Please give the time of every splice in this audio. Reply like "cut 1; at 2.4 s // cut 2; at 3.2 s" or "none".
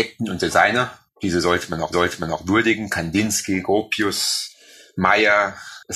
cut 1; at 1.9 s